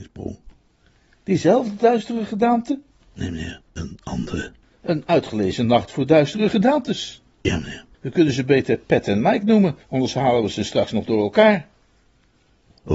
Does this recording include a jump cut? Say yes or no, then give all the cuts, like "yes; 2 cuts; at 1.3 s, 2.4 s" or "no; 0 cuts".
yes; 6 cuts; at 3.0 s, 3.7 s, 4.6 s, 7.3 s, 7.9 s, 9.8 s